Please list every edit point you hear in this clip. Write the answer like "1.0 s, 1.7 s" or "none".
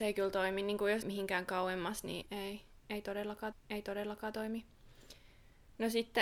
1.0 s, 2.2 s, 3.5 s